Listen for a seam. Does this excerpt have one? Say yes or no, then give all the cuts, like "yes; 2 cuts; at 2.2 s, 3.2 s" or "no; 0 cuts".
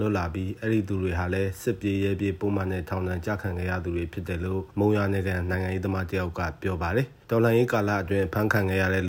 yes; 2 cuts; at 4.7 s, 7.2 s